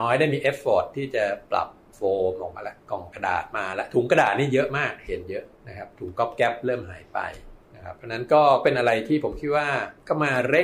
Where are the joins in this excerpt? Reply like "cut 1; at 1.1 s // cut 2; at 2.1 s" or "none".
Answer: cut 1; at 2.8 s // cut 2; at 5.6 s